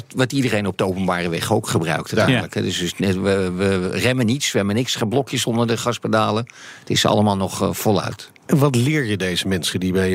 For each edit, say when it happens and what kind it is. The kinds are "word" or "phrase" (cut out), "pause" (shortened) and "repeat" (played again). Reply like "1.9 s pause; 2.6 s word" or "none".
none